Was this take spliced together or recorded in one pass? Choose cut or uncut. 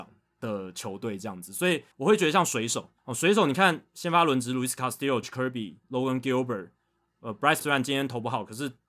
cut